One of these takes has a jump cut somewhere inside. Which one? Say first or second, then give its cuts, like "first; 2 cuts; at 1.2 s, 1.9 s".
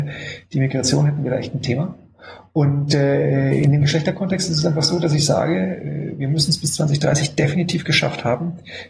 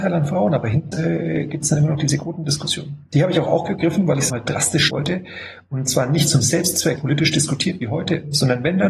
second; 4 cuts; at 0.9 s, 4.3 s, 4.9 s, 7.0 s